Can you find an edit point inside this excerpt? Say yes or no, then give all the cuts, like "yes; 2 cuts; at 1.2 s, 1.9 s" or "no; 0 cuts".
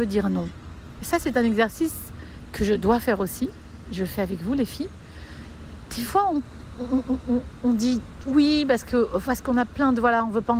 no; 0 cuts